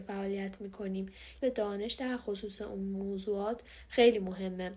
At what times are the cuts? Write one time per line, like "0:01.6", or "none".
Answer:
0:01.4